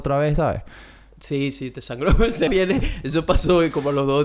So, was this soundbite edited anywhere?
yes; 1 cut; at 2.5 s

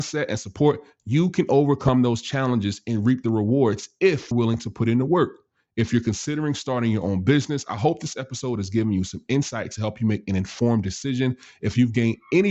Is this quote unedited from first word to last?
no; 1 cut; at 4.3 s

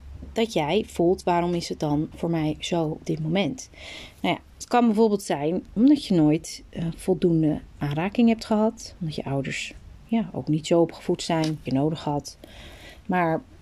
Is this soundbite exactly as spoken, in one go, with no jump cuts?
no; 3 cuts; at 2.1 s, 5.8 s, 11.7 s

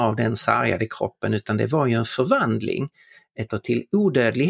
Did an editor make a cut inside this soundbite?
yes; 1 cut; at 3.5 s

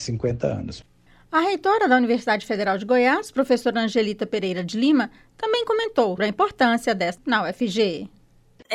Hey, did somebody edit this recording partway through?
yes; 2 cuts; at 6.2 s, 7.2 s

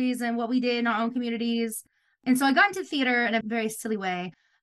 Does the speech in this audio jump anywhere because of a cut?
yes; 1 cut; at 3.4 s

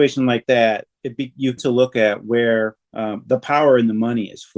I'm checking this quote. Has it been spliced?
yes; 2 cuts; at 1.6 s, 2.8 s

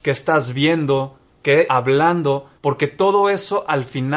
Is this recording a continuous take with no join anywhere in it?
no; 2 cuts; at 1.7 s, 2.6 s

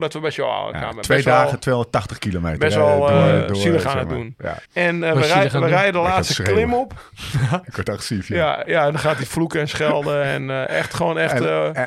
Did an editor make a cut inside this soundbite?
yes; 1 cut; at 4.6 s

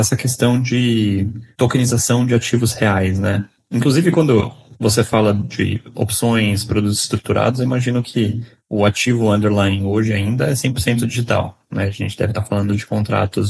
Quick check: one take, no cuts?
yes; 0 cuts

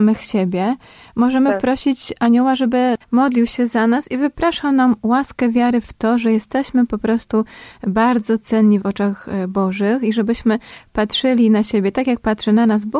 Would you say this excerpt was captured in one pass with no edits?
no; 1 cut; at 3.0 s

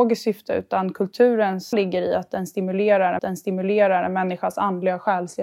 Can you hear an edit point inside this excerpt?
yes; 2 cuts; at 1.7 s, 3.2 s

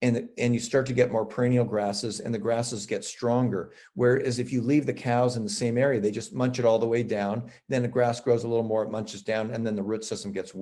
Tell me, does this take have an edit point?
no; 0 cuts

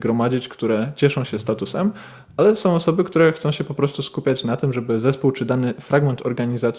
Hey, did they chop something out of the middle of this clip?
no; 0 cuts

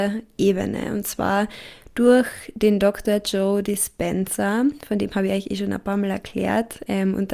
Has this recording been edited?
no; 0 cuts

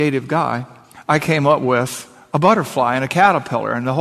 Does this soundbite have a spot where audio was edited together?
no; 0 cuts

